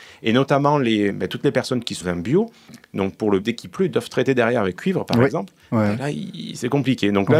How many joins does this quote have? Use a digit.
4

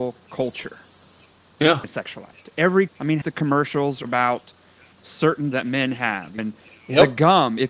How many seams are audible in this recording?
6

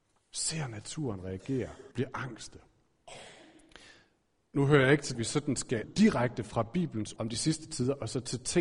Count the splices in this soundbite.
4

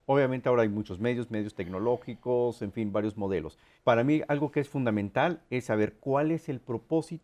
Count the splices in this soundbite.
1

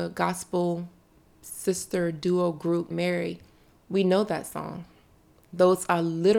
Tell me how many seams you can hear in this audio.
1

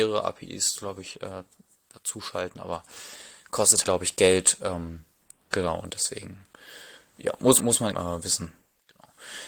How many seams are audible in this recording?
3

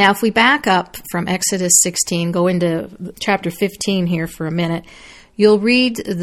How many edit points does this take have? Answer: 1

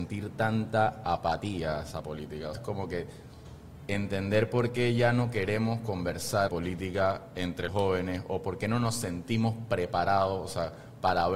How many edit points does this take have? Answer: 3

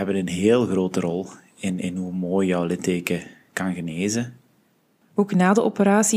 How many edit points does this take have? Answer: 0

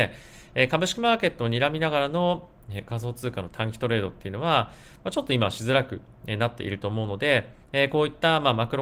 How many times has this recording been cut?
1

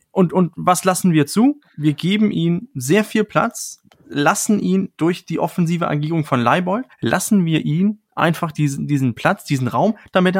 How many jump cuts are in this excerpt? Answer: 1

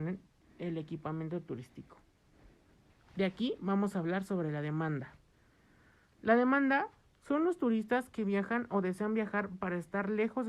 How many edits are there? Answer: 0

